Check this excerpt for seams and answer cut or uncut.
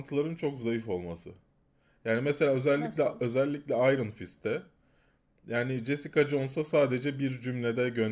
uncut